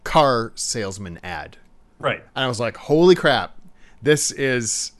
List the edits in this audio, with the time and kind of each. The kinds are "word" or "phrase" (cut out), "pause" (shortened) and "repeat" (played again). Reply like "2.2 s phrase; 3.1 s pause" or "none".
none